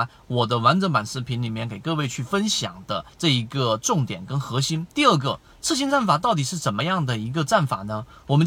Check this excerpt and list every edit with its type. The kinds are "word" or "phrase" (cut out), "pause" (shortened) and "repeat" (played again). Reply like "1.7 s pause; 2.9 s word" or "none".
3.1 s pause; 4.9 s pause